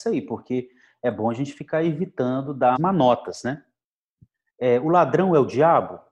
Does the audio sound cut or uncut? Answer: cut